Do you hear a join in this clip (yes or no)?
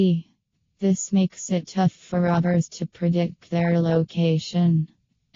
yes